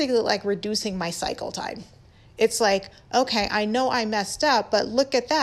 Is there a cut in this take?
no; 0 cuts

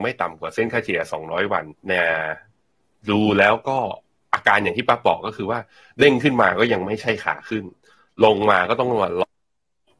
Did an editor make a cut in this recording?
yes; 1 cut; at 1.8 s

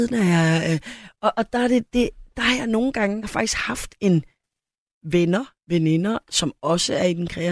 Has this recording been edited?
yes; 3 cuts; at 1.3 s, 3.2 s, 4.4 s

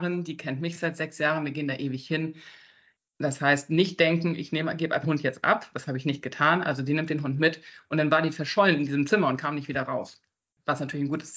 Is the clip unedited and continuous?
no; 1 cut; at 5.0 s

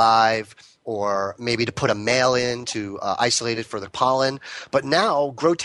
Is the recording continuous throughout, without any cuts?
yes; 0 cuts

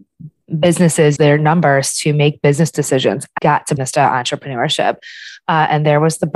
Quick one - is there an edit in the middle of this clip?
yes; 3 cuts; at 1.2 s, 3.4 s, 3.8 s

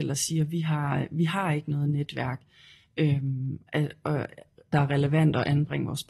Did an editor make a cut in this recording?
no; 0 cuts

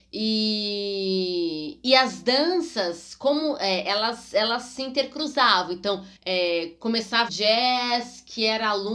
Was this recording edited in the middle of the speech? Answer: yes; 2 cuts; at 6.2 s, 7.3 s

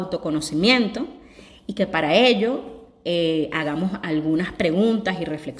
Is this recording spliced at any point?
no; 0 cuts

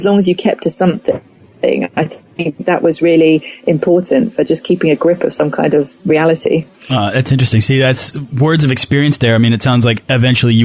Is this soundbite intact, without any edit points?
yes; 0 cuts

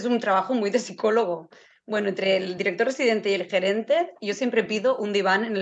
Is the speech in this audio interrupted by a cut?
no; 0 cuts

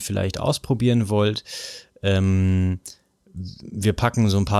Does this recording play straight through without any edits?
yes; 0 cuts

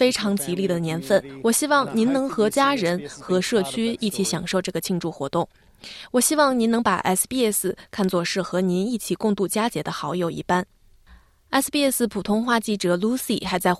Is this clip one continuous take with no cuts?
yes; 0 cuts

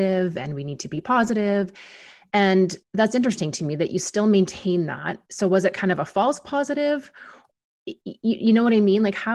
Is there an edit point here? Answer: yes; 1 cut; at 2.8 s

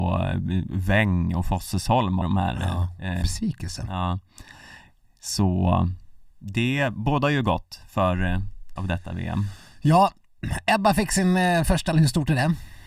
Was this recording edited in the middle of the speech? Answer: yes; 5 cuts; at 2.2 s, 3.2 s, 6.3 s, 8.8 s, 11.9 s

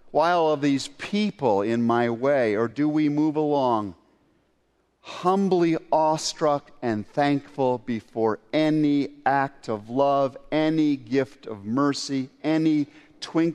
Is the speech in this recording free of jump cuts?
yes; 0 cuts

